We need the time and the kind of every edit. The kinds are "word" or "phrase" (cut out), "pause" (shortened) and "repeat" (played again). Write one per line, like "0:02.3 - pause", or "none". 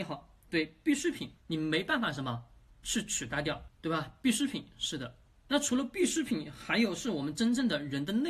0:01.4 - pause